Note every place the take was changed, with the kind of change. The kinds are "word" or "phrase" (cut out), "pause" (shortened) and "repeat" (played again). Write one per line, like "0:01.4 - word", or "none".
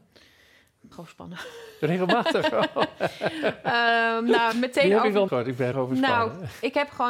0:00.9 - word
0:04.5 - word
0:05.3 - word
0:05.7 - word